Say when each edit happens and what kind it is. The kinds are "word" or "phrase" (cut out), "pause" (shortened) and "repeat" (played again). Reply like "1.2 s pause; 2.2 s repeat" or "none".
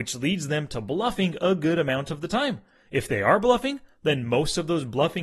none